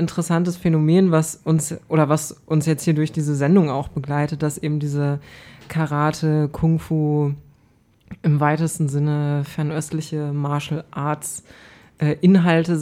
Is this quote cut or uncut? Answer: uncut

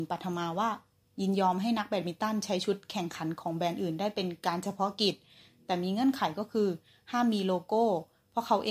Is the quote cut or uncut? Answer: uncut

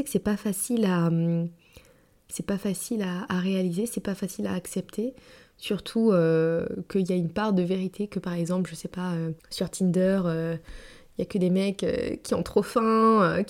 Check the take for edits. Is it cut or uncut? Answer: cut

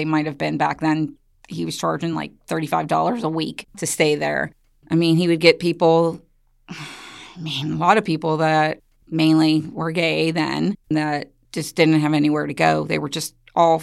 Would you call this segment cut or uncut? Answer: uncut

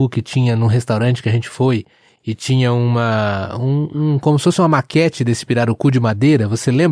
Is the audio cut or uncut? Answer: uncut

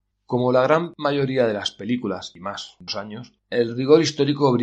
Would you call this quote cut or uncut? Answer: cut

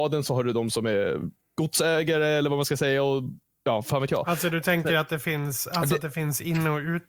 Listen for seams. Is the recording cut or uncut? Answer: uncut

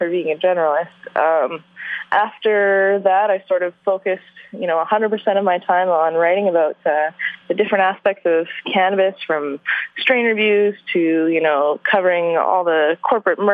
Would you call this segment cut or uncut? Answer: uncut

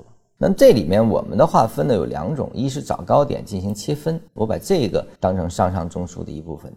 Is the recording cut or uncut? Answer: cut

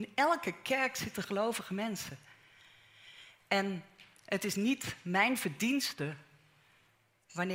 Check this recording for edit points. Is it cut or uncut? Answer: uncut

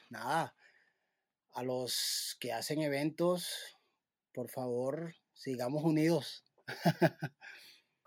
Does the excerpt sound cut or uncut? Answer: uncut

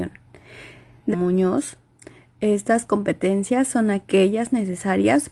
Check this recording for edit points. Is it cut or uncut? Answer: cut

